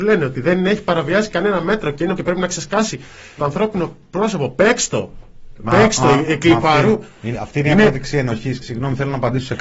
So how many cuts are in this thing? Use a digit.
4